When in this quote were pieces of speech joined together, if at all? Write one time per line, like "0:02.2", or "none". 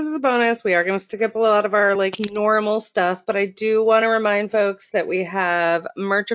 none